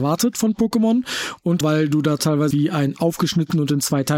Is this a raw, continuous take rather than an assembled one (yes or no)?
no